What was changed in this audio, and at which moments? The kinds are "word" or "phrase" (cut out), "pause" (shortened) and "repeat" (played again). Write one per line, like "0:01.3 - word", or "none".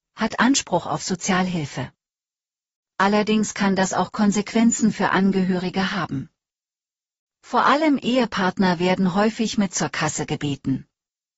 none